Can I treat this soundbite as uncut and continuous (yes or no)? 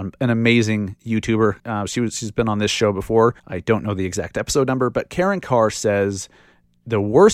no